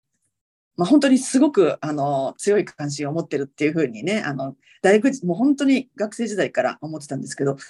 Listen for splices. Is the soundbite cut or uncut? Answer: uncut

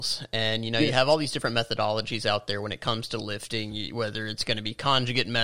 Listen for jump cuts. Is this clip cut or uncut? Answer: uncut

